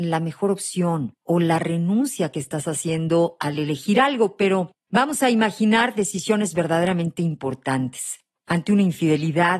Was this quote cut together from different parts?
no; 0 cuts

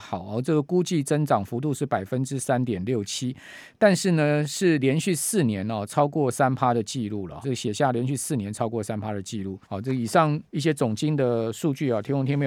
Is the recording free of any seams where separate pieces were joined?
no; 3 cuts; at 7.4 s, 9.6 s, 10.5 s

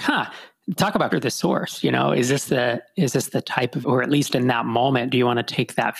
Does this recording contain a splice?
yes; 2 cuts; at 1.1 s, 3.8 s

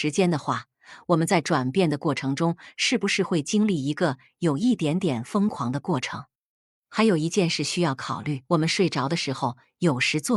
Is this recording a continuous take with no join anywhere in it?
no; 1 cut; at 8.4 s

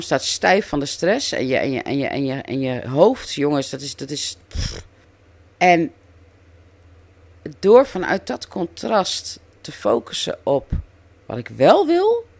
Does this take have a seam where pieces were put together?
yes; 1 cut; at 5.0 s

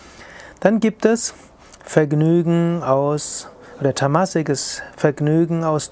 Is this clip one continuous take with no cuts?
yes; 0 cuts

